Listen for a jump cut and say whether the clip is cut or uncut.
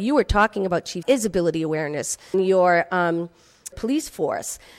cut